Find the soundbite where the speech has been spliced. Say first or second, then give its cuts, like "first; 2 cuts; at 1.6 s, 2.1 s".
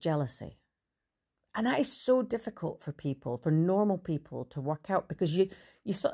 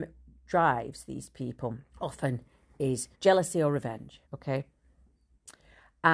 second; 3 cuts; at 1.9 s, 3.1 s, 4.3 s